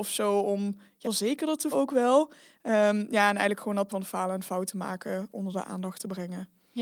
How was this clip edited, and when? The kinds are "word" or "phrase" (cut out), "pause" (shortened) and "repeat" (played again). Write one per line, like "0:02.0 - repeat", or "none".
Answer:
0:01.0 - word
0:01.7 - word
0:03.9 - word